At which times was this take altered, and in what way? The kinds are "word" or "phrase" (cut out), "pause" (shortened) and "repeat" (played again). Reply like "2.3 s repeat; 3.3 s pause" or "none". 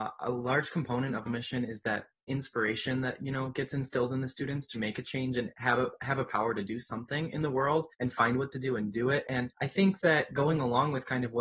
1.3 s phrase; 4.8 s word; 7.9 s pause; 8.5 s phrase; 9.5 s pause